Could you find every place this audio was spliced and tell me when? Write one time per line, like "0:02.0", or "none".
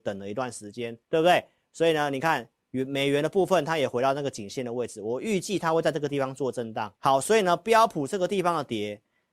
0:01.0
0:07.0